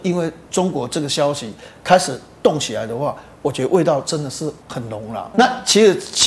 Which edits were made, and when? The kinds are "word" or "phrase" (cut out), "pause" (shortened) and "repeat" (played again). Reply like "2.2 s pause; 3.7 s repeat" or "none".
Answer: 4.6 s pause; 5.3 s word